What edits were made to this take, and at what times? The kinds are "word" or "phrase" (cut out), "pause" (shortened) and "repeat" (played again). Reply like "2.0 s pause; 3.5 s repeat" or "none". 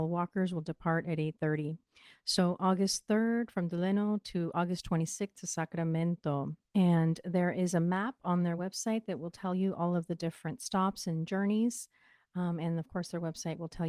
none